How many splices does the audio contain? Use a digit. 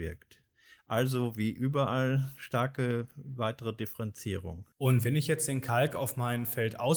1